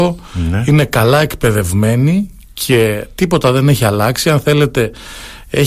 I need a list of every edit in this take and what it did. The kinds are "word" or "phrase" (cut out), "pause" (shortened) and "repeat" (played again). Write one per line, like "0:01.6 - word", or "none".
none